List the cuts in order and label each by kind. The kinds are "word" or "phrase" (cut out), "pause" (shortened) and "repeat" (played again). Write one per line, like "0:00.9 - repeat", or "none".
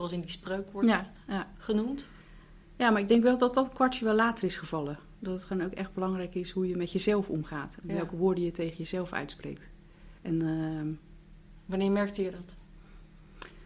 0:10.2 - pause